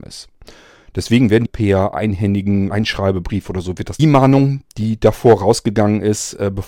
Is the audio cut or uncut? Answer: cut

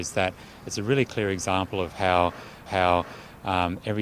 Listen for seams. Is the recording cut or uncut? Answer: cut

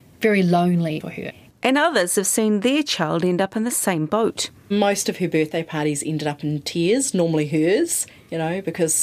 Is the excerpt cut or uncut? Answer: cut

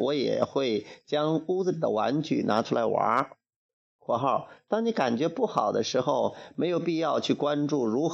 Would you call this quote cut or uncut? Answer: cut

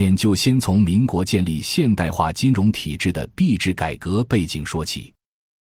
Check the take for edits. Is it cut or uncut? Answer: uncut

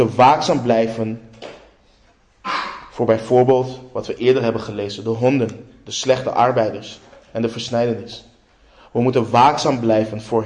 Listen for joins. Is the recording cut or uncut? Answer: uncut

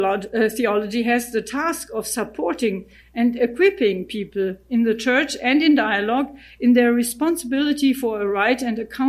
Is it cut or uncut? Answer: uncut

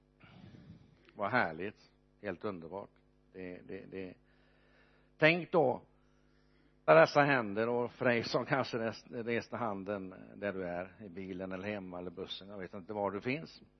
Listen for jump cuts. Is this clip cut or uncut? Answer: cut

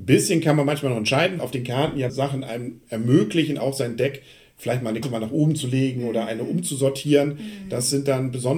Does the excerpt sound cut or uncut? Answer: cut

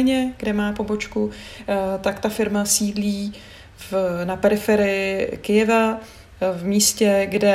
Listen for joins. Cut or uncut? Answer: uncut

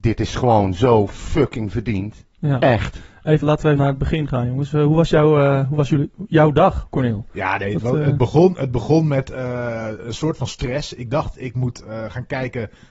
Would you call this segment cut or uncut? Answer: cut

